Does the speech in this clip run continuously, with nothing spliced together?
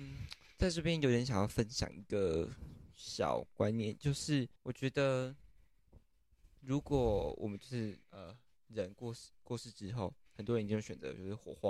no; 2 cuts; at 4.6 s, 8.0 s

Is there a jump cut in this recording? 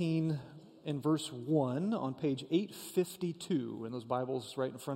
no; 0 cuts

